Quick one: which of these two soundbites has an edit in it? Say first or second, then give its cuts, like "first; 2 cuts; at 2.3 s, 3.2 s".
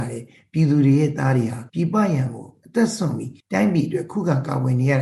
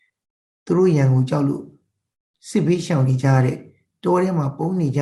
first; 2 cuts; at 1.7 s, 3.4 s